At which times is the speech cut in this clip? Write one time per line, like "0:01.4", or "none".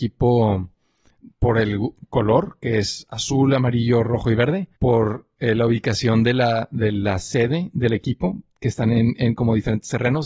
0:04.8